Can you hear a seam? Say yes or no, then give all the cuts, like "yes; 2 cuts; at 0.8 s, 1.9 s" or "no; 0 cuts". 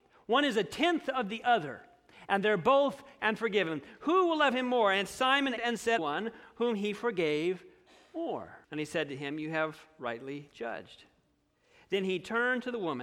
yes; 4 cuts; at 3.2 s, 5.6 s, 6.0 s, 8.6 s